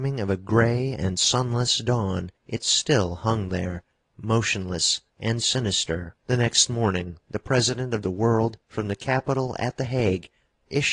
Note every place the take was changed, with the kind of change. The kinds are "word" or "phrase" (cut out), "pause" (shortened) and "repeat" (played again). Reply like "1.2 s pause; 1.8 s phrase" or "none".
2.4 s pause; 5.1 s word; 6.2 s pause; 8.0 s phrase; 8.6 s pause

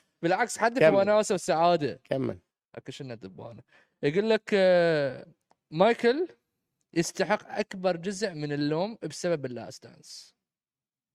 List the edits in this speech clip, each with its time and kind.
none

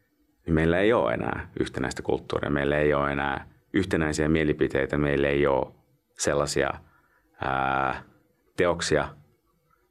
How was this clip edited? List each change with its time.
none

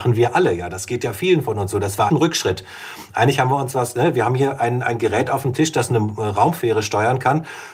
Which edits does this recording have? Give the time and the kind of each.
2.1 s word

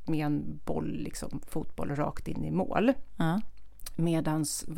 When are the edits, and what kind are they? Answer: none

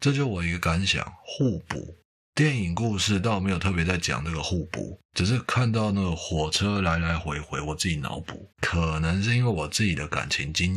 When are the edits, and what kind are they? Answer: 5.1 s pause; 8.5 s pause

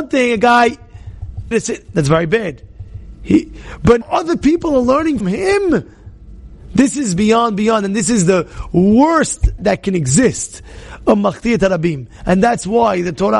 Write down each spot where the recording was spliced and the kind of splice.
1.5 s word; 4.0 s word; 5.2 s word; 7.2 s word; 9.6 s word

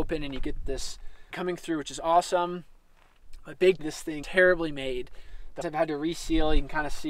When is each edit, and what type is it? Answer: 1.3 s word; 3.8 s word; 4.2 s word; 5.6 s word

